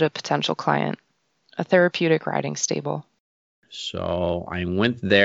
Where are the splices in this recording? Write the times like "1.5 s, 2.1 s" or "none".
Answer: none